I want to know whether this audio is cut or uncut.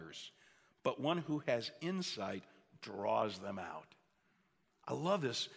uncut